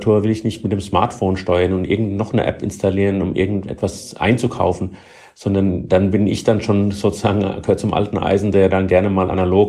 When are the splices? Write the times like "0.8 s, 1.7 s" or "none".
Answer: none